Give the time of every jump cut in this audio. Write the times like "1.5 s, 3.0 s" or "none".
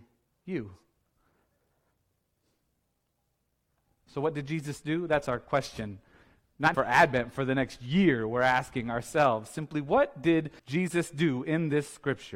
6.7 s, 10.6 s